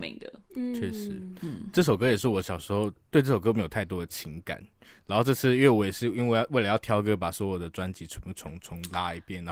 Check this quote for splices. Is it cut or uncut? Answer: uncut